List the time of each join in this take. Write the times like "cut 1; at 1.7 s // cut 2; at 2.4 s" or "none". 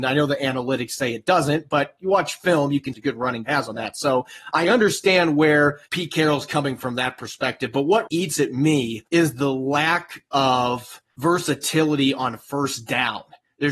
cut 1; at 2.9 s // cut 2; at 3.4 s // cut 3; at 5.9 s // cut 4; at 6.8 s // cut 5; at 8.1 s // cut 6; at 9.1 s // cut 7; at 11.1 s

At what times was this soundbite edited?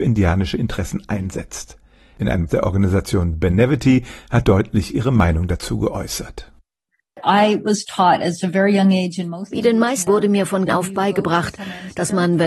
cut 1; at 2.5 s // cut 2; at 4.4 s // cut 3; at 10.1 s // cut 4; at 10.7 s

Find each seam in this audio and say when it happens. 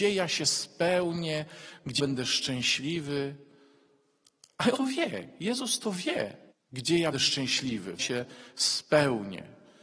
cut 1; at 2.0 s // cut 2; at 4.7 s // cut 3; at 6.5 s // cut 4; at 7.1 s // cut 5; at 8.0 s

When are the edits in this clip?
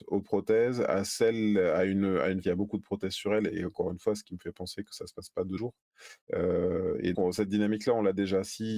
cut 1; at 2.4 s // cut 2; at 5.6 s // cut 3; at 6.2 s // cut 4; at 7.1 s

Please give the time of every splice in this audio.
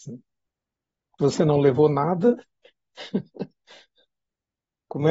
cut 1; at 1.2 s

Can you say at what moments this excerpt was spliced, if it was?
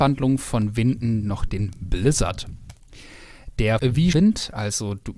cut 1; at 3.8 s // cut 2; at 4.1 s

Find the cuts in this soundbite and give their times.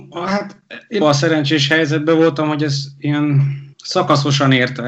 cut 1; at 1.0 s // cut 2; at 3.7 s

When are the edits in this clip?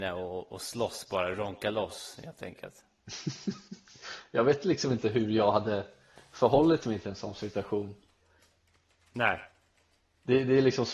none

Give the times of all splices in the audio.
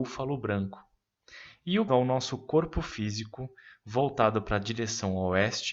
cut 1; at 1.9 s

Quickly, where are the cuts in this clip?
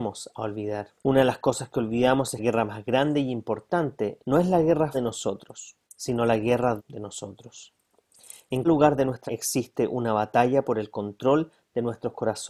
cut 1; at 1.0 s // cut 2; at 2.4 s // cut 3; at 4.2 s // cut 4; at 4.9 s // cut 5; at 5.8 s // cut 6; at 6.8 s // cut 7; at 8.6 s // cut 8; at 9.3 s

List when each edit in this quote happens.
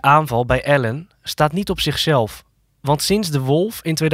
none

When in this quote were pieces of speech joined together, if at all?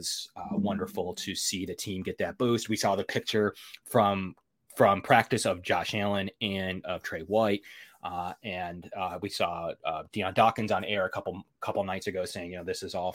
none

